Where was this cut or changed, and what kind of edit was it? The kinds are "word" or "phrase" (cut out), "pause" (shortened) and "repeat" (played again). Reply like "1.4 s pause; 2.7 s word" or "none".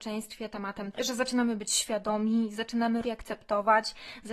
0.9 s word; 3.0 s word